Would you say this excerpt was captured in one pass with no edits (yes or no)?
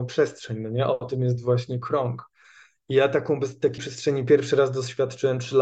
no